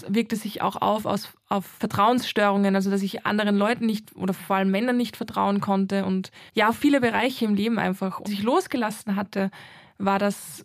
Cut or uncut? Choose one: cut